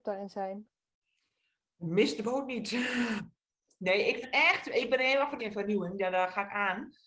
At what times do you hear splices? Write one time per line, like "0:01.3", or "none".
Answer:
0:04.2
0:05.4